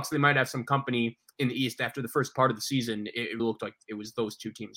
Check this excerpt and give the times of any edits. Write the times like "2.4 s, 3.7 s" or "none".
3.4 s